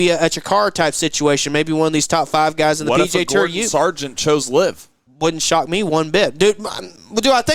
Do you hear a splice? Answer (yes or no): no